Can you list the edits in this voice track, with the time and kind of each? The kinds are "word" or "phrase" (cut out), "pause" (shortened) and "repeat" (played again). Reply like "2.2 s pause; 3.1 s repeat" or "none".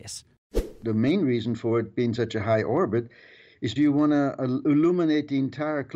3.8 s word